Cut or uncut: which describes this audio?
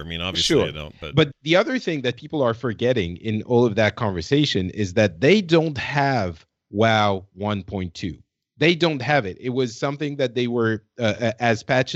cut